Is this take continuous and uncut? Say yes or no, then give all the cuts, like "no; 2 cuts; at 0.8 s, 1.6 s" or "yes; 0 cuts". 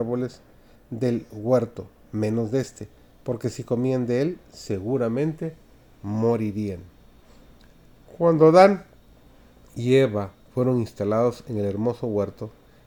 yes; 0 cuts